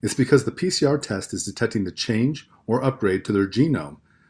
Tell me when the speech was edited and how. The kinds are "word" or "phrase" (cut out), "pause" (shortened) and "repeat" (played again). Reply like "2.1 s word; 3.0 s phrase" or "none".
none